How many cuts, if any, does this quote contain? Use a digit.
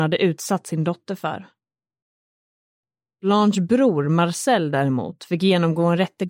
0